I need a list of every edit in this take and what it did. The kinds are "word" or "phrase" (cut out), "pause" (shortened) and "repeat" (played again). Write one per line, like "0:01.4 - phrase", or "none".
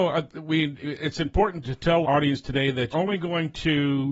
0:01.6 - word
0:02.0 - word
0:02.9 - word